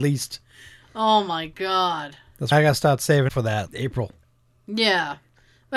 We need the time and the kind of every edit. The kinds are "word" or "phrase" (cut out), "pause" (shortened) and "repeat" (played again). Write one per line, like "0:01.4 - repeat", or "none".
0:02.5 - word
0:03.3 - word
0:03.7 - word